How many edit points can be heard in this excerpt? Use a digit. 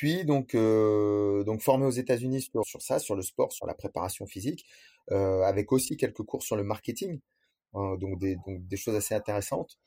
1